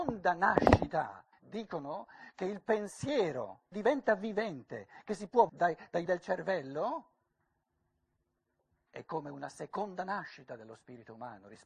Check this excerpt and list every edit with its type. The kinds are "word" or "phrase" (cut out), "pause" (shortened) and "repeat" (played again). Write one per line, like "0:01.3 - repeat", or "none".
0:01.3 - pause
0:03.7 - word
0:05.5 - phrase
0:06.1 - word